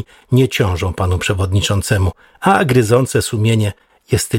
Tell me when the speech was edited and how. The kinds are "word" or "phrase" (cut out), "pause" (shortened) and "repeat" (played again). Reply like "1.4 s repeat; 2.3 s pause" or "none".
none